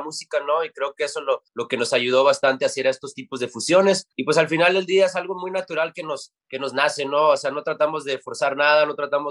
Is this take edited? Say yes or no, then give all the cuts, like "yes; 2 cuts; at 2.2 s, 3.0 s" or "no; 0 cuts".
yes; 2 cuts; at 1.5 s, 4.1 s